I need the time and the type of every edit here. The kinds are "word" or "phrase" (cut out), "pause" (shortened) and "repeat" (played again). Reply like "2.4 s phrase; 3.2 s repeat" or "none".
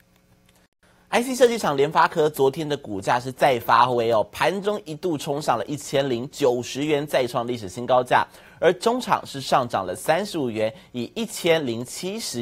none